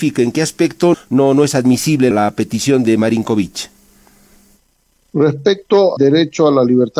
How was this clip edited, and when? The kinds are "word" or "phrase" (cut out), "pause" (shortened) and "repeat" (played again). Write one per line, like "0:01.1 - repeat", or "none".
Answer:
0:00.9 - word
0:02.1 - word
0:06.0 - word

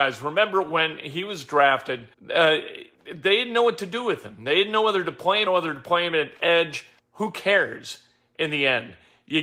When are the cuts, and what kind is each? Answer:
0:02.1 - pause
0:02.9 - pause
0:05.5 - phrase
0:07.0 - pause

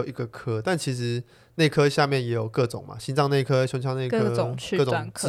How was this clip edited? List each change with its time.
none

